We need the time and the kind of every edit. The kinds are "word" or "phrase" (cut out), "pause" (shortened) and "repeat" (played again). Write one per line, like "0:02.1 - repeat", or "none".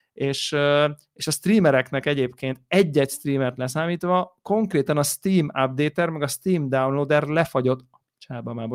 none